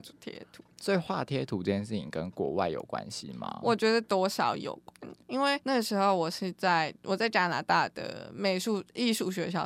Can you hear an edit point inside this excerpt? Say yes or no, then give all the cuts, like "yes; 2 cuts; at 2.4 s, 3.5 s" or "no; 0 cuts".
yes; 1 cut; at 5.6 s